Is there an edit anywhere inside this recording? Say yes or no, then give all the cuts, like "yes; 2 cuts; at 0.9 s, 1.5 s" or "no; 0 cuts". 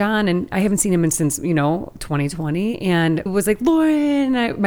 yes; 1 cut; at 3.3 s